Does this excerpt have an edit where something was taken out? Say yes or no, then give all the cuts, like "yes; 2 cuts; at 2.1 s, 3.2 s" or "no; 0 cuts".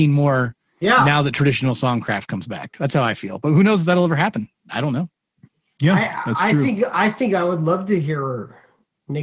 yes; 1 cut; at 5.4 s